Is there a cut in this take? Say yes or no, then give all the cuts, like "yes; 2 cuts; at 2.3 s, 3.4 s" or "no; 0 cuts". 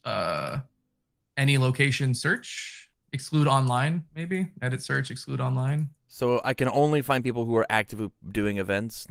yes; 2 cuts; at 4.1 s, 6.0 s